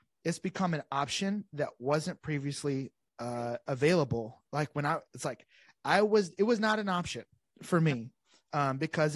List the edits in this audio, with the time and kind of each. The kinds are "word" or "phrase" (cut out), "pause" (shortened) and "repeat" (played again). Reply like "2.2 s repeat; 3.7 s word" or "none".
none